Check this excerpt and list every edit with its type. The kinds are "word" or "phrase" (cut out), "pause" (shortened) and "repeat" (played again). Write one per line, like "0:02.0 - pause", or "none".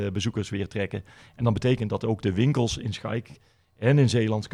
none